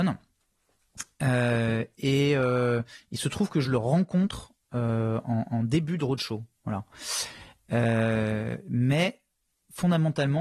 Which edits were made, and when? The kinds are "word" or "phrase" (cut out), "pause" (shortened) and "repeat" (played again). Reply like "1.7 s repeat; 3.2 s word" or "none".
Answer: none

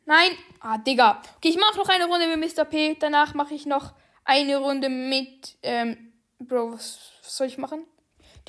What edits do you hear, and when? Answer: none

